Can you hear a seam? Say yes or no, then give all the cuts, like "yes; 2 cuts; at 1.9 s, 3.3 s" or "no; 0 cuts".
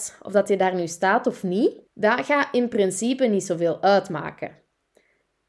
yes; 1 cut; at 1.9 s